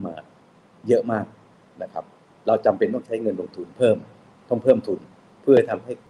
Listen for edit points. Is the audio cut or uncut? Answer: cut